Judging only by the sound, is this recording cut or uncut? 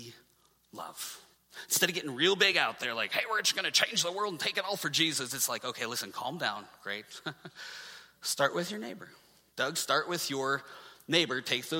uncut